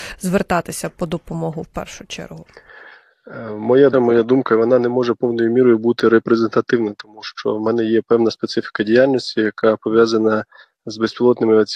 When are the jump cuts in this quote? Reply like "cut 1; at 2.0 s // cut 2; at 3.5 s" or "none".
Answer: cut 1; at 3.9 s